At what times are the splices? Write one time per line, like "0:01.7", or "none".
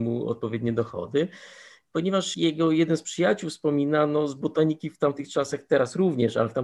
0:02.3